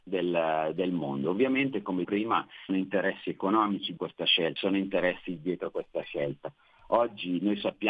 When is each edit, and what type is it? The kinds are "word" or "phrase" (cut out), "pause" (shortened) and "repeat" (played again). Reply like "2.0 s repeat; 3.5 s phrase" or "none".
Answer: 2.0 s word; 2.7 s phrase; 4.0 s word; 4.6 s word; 5.4 s word

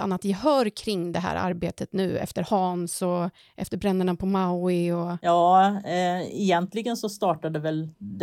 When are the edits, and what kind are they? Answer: none

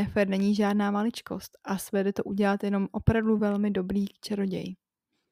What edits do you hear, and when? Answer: none

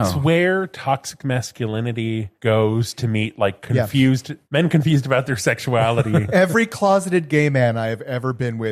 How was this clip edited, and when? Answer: 2.4 s pause; 4.4 s pause

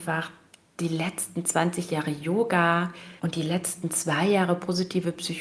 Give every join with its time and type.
3.2 s pause

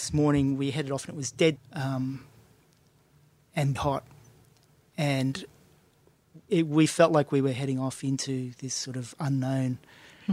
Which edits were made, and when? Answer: 1.6 s word; 3.8 s word

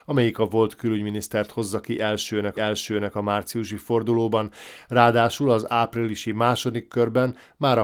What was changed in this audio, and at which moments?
2.6 s repeat

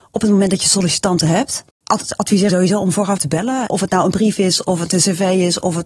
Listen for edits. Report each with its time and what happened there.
2.5 s word; 3.2 s word

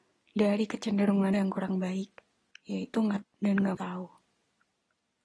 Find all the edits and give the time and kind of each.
1.3 s word; 2.5 s pause; 3.2 s phrase; 3.7 s phrase

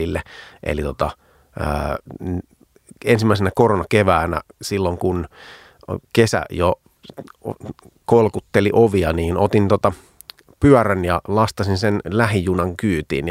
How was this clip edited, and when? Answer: none

